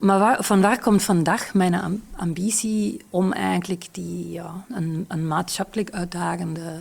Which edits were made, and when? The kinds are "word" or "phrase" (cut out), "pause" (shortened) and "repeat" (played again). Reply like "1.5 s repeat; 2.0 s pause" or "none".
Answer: none